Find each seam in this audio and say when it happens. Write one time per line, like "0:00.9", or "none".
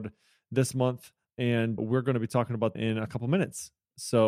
0:01.8
0:02.7